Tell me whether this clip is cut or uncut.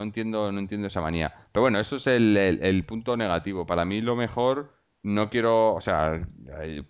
uncut